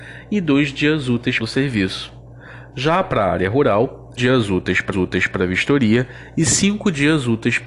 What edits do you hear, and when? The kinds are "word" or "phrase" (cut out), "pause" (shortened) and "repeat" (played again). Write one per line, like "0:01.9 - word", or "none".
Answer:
0:01.4 - phrase
0:04.2 - word
0:04.9 - repeat